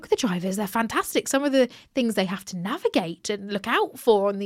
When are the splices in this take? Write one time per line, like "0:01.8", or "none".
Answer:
none